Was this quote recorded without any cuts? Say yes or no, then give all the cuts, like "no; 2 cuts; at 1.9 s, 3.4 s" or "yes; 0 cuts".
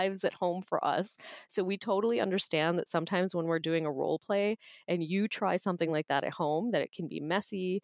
yes; 0 cuts